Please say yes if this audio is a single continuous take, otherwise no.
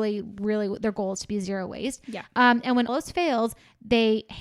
no